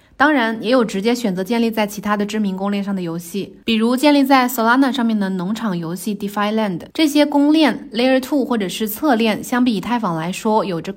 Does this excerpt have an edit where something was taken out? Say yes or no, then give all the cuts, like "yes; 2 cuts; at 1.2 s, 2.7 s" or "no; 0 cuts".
yes; 2 cuts; at 3.6 s, 6.9 s